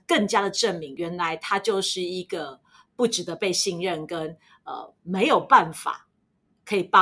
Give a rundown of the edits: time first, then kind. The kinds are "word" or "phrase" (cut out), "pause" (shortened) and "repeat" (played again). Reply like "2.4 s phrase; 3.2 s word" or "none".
none

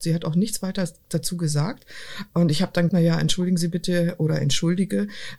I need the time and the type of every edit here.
2.9 s word

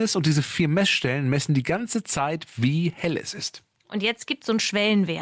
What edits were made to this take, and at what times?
none

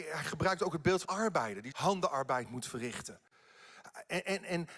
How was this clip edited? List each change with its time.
1.0 s word; 1.7 s word

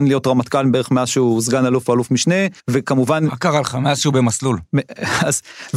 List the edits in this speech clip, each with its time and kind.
2.6 s pause

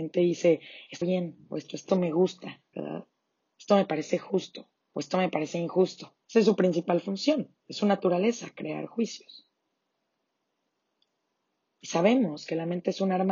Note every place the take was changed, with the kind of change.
1.0 s word; 1.9 s phrase; 2.7 s phrase; 4.8 s pause; 6.2 s pause; 7.6 s pause

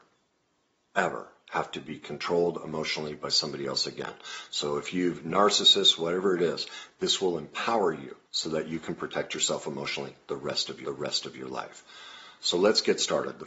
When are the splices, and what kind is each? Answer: 8.3 s pause; 10.8 s repeat

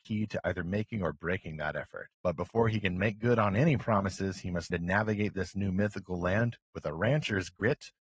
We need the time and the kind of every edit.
2.1 s pause; 4.7 s word

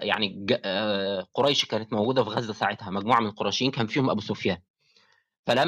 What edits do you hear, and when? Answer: none

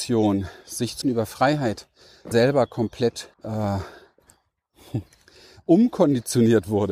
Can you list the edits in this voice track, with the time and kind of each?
1.0 s word; 2.3 s word; 3.3 s pause

